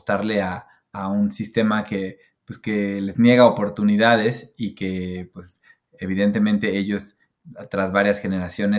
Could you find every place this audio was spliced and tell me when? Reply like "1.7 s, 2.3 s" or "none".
none